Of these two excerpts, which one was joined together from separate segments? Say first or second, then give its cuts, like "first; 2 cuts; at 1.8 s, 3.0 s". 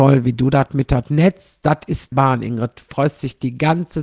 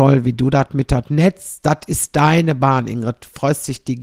first; 1 cut; at 2.1 s